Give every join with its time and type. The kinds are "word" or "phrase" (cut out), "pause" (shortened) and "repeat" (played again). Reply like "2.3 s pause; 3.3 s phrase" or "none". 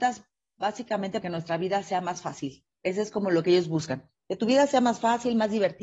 1.2 s word